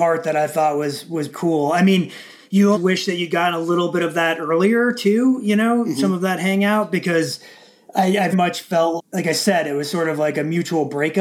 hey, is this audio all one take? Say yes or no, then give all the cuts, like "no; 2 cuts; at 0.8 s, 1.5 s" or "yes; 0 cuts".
no; 4 cuts; at 1.3 s, 2.7 s, 8.3 s, 9.0 s